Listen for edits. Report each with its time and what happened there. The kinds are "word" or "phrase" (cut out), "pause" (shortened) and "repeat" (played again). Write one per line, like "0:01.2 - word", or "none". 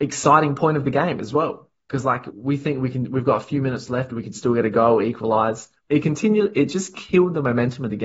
0:05.8 - pause

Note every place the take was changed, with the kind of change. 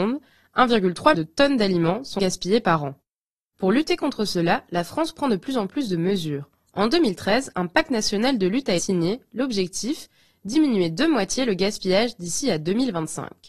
0:01.1 - word
0:02.2 - word
0:08.8 - word

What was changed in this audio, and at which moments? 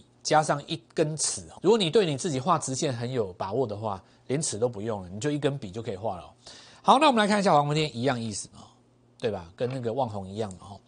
0:01.6 - word

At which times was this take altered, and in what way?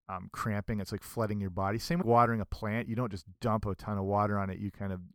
0:02.0 - word

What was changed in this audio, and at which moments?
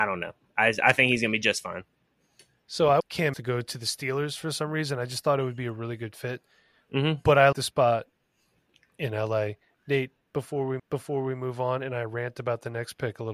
0:03.0 - word
0:03.3 - word
0:07.5 - word
0:10.8 - repeat

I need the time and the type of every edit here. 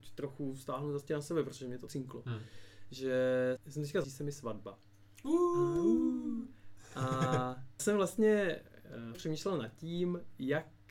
0:01.1 - word
0:01.9 - word
0:03.6 - word
0:04.0 - phrase
0:07.8 - word
0:09.1 - word

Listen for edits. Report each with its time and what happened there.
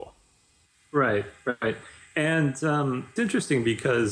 0:03.2 - word

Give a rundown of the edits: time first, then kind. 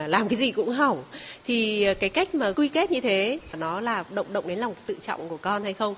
0:04.2 - repeat

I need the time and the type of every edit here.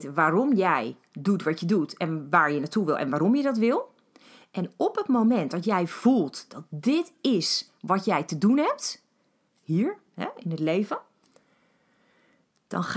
none

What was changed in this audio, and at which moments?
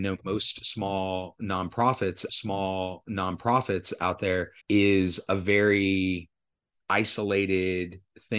0:02.3 - repeat
0:04.6 - pause

